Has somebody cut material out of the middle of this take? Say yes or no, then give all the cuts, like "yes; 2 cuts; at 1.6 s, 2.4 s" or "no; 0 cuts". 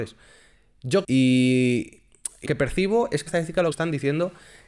yes; 4 cuts; at 1.0 s, 2.5 s, 3.3 s, 3.7 s